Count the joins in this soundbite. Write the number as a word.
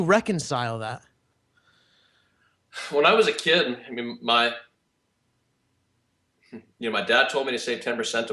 zero